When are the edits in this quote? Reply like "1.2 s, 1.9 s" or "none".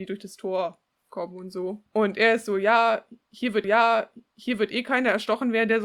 1.9 s, 3.6 s